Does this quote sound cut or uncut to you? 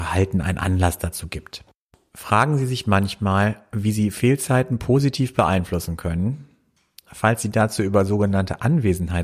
uncut